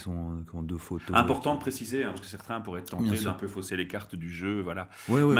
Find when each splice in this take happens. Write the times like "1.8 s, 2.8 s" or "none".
none